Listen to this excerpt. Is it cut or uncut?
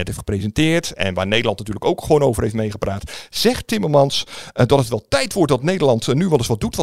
uncut